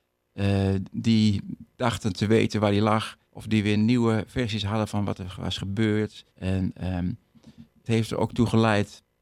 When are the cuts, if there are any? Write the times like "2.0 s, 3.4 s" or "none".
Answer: 1.7 s, 3.3 s, 6.3 s, 7.9 s